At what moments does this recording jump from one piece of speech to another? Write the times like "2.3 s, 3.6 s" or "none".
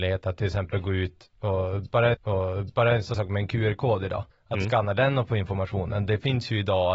2.1 s, 3.1 s, 4.3 s